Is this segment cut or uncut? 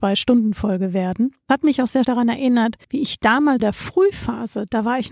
cut